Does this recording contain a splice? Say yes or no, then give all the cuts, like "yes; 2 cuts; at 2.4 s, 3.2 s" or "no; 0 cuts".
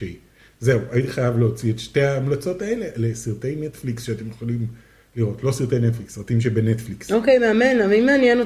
no; 0 cuts